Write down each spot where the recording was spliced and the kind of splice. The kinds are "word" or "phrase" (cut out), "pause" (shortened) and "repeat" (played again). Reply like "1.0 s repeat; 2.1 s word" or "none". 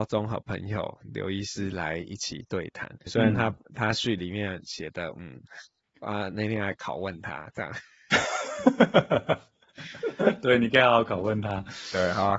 3.1 s word; 5.8 s pause